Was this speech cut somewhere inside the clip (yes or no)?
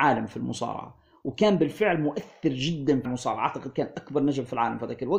yes